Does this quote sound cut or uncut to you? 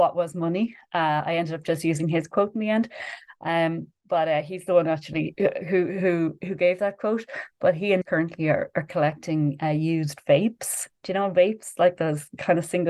cut